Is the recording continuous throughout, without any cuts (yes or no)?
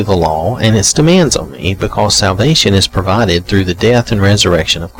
yes